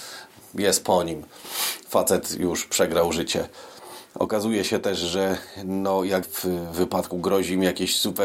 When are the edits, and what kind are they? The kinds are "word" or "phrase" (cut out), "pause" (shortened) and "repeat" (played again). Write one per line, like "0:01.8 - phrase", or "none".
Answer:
0:06.2 - word
0:07.1 - word